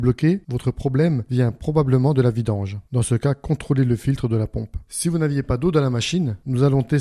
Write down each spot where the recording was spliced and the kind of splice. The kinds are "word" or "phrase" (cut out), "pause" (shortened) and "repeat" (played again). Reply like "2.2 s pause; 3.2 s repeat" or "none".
none